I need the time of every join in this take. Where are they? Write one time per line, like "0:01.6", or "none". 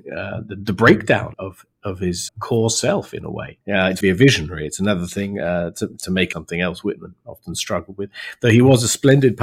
0:01.3
0:02.3
0:03.6
0:04.0
0:06.3